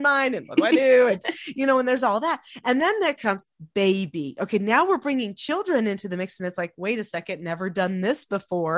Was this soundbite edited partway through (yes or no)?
no